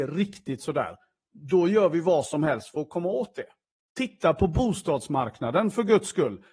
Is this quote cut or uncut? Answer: uncut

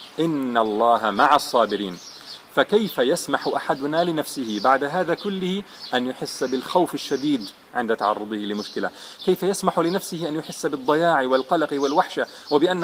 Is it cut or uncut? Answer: uncut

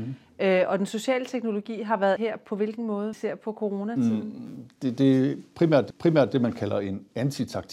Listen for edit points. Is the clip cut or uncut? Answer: cut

